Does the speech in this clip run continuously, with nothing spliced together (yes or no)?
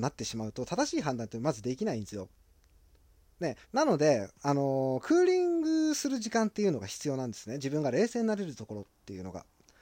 no